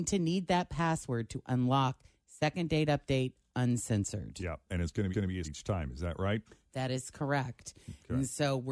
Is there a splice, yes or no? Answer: yes